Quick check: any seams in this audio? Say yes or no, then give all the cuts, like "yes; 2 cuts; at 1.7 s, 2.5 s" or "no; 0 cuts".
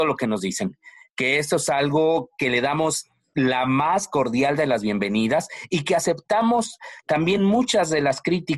no; 0 cuts